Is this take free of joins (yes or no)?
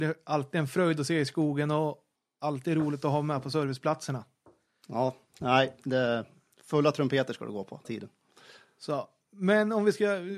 no